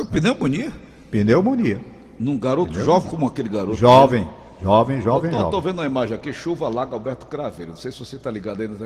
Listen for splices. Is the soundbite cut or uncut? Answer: uncut